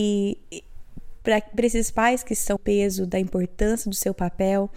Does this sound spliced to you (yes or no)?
yes